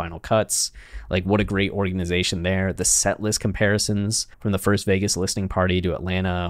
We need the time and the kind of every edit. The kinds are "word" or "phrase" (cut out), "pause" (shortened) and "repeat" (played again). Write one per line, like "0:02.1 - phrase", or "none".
0:04.3 - pause